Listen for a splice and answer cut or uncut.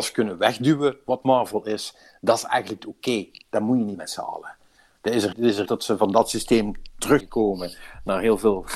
cut